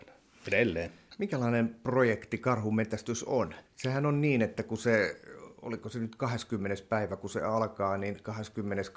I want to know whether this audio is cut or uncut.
cut